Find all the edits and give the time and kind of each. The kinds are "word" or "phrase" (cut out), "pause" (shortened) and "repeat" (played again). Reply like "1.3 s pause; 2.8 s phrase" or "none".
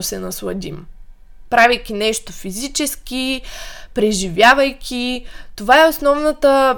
none